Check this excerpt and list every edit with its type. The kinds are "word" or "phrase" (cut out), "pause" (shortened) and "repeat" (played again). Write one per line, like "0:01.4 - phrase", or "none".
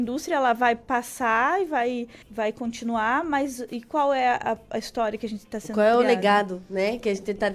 0:02.2 - pause